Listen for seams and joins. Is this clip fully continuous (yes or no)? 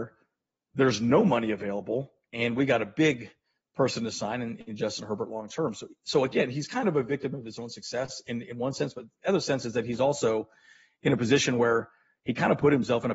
yes